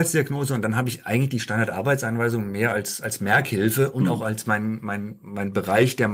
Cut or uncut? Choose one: uncut